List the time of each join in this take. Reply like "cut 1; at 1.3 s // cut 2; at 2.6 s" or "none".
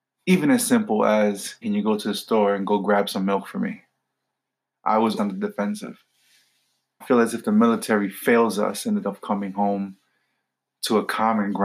cut 1; at 1.6 s // cut 2; at 5.2 s // cut 3; at 7.0 s // cut 4; at 9.0 s